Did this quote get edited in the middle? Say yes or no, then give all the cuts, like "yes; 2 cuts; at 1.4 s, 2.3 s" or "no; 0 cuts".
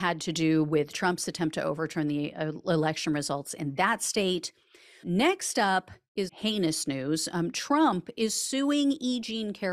yes; 2 cuts; at 5.0 s, 6.3 s